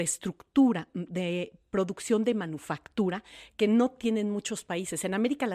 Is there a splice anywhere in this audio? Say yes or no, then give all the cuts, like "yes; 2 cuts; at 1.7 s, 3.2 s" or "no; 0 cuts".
no; 0 cuts